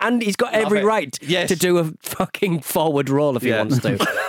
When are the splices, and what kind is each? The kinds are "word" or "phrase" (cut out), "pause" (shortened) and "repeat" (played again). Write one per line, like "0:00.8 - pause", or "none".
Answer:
0:02.6 - word